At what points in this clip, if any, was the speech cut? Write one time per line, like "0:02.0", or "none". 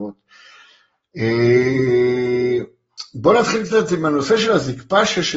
none